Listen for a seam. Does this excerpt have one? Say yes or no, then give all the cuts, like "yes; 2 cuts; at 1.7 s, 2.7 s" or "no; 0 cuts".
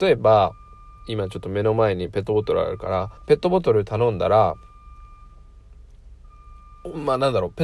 yes; 1 cut; at 3.2 s